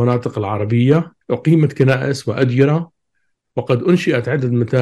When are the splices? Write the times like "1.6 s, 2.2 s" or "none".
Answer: 1.2 s